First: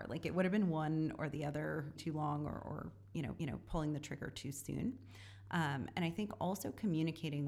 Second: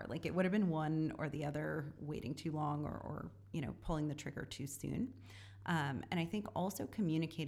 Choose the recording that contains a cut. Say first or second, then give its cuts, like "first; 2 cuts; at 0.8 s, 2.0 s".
first; 2 cuts; at 2.0 s, 3.4 s